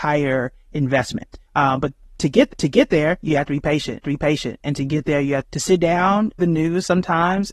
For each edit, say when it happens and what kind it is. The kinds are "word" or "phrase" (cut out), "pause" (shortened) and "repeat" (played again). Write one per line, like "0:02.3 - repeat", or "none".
0:01.5 - pause
0:02.5 - repeat
0:04.0 - repeat
0:05.4 - word
0:06.4 - word